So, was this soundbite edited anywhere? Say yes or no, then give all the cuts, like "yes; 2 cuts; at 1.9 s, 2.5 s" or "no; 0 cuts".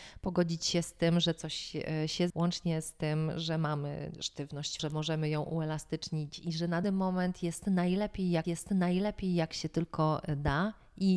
yes; 4 cuts; at 2.3 s, 4.8 s, 6.8 s, 8.4 s